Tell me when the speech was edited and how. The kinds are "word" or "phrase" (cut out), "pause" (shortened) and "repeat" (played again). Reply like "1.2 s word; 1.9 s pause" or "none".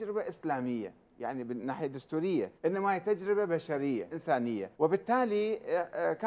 2.6 s pause; 4.1 s word; 4.7 s pause